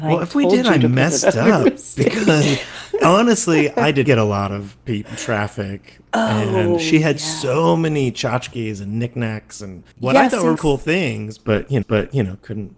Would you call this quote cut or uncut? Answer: cut